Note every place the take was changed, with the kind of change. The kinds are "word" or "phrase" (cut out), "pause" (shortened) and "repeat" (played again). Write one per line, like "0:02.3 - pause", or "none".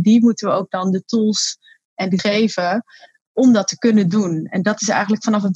0:02.2 - word